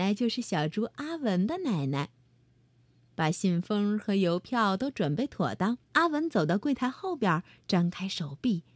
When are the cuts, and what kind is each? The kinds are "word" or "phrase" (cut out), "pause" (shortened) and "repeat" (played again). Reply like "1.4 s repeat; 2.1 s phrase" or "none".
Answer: 5.8 s pause